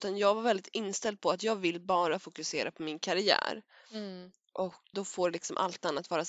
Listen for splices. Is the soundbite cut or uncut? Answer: cut